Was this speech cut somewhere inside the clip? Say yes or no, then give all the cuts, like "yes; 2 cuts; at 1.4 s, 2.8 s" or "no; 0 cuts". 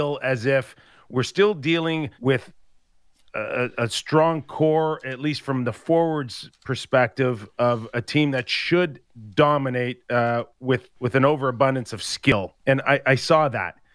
yes; 3 cuts; at 2.2 s, 10.9 s, 12.6 s